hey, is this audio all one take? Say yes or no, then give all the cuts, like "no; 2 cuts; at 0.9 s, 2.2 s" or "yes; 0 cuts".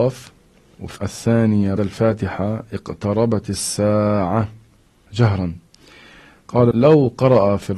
no; 4 cuts; at 1.0 s, 1.8 s, 5.1 s, 6.7 s